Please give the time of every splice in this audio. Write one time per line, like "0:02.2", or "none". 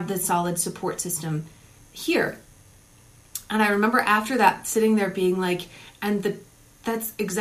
none